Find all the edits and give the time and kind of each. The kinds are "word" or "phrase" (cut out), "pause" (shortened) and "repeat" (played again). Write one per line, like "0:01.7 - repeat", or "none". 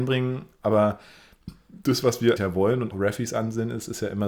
0:02.4 - word
0:02.9 - phrase